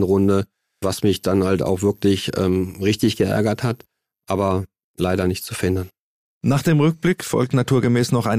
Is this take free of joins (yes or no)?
yes